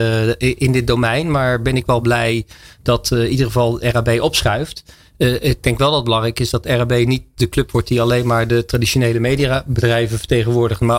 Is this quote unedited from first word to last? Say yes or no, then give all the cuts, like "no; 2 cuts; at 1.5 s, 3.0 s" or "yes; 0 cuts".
yes; 0 cuts